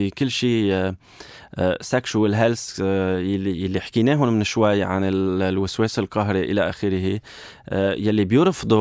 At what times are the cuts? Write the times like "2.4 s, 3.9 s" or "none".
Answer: none